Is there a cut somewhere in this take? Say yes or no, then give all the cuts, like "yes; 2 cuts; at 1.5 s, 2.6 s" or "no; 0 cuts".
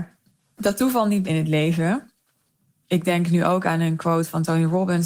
yes; 1 cut; at 1.2 s